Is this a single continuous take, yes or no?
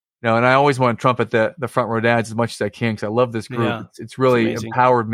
yes